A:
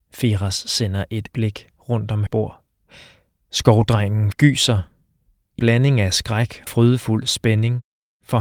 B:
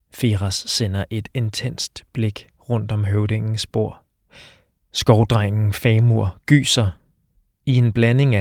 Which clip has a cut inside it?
A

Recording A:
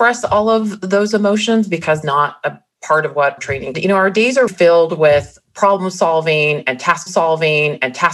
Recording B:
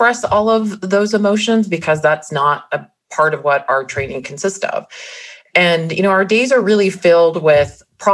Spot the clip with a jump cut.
A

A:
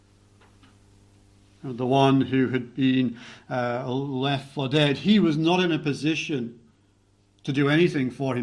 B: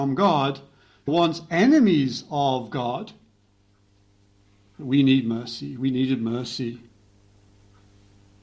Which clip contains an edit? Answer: B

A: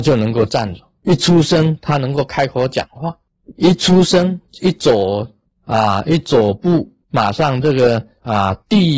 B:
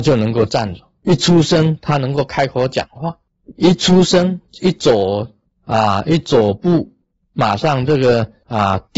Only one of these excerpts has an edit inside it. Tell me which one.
A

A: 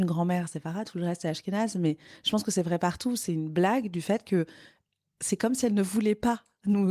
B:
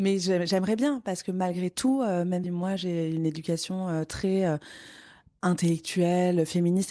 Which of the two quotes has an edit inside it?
B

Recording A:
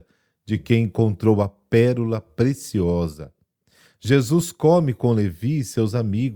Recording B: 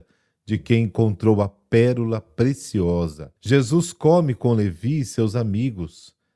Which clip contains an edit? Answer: B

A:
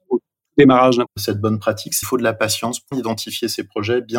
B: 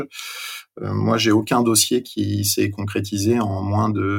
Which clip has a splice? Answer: A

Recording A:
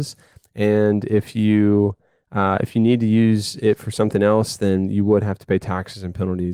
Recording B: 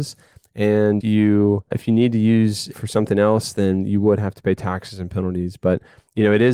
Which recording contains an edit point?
B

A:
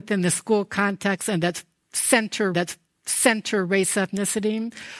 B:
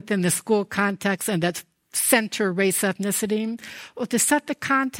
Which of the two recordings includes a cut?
A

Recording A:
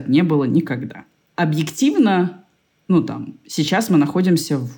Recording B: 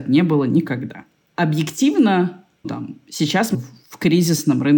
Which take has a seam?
B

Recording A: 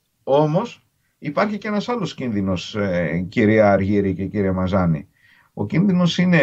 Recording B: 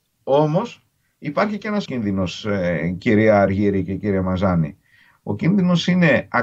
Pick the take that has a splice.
B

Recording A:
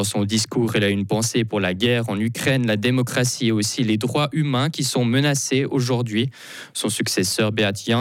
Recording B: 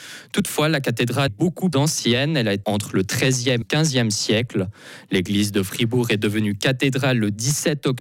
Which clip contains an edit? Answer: B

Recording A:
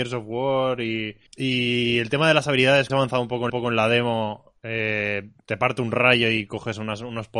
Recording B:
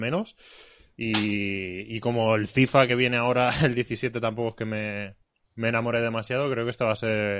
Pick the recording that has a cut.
A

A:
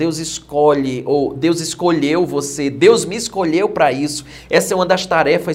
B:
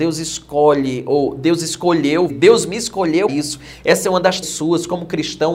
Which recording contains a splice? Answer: B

